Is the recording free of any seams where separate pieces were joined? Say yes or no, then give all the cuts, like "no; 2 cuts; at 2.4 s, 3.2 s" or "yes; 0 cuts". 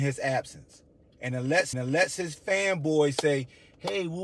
no; 1 cut; at 1.7 s